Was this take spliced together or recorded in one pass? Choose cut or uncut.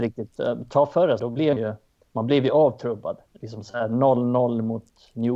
cut